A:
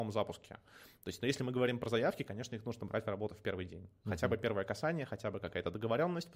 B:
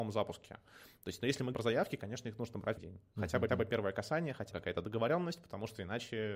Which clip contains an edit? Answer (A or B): B